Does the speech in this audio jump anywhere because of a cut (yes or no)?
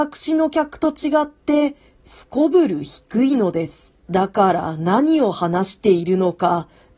yes